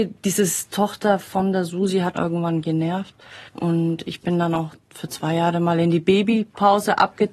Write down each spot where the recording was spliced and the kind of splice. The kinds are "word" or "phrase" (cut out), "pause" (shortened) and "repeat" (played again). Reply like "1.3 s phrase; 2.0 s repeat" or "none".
2.1 s word; 3.5 s pause